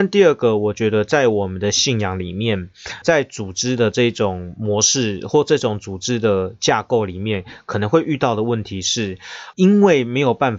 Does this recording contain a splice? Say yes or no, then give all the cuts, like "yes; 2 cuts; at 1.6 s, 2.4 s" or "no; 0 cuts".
yes; 2 cuts; at 3.0 s, 9.5 s